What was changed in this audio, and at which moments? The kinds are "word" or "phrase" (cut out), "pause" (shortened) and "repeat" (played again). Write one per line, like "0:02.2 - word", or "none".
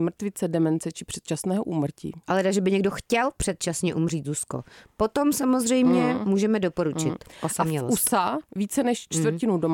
0:08.5 - pause